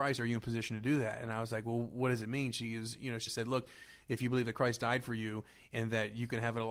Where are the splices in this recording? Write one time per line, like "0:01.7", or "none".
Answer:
0:03.3